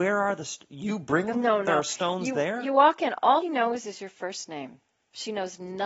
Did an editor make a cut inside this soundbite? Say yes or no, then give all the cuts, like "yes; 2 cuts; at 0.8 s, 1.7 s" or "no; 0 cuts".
yes; 2 cuts; at 1.3 s, 3.4 s